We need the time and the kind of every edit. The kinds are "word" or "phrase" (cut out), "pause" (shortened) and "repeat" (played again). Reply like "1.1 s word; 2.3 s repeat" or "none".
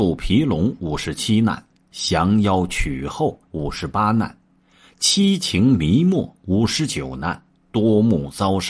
3.4 s pause

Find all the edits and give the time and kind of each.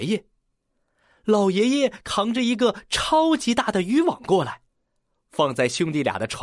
none

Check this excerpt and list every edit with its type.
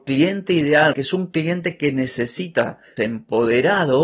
0.9 s word; 3.0 s word

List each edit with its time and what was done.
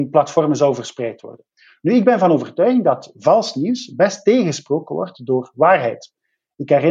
none

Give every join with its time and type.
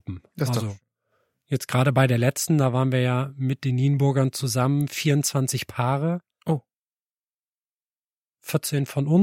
none

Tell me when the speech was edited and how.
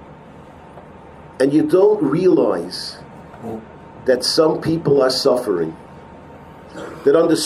none

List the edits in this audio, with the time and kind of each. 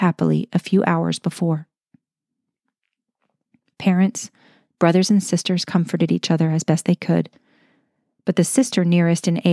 none

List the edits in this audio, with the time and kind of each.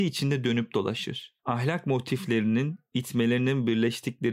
1.4 s pause

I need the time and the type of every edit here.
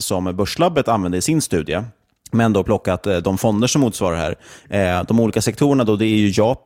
none

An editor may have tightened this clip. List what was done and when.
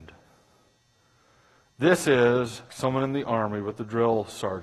2.7 s word

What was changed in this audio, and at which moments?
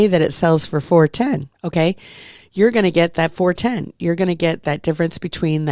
1.5 s pause

